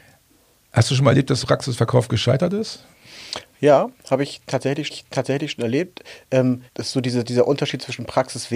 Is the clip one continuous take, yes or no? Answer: no